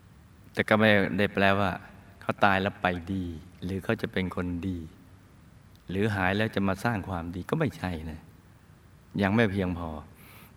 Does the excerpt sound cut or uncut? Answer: uncut